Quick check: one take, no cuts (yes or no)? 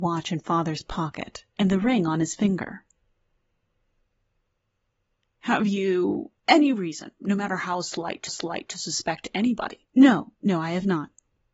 no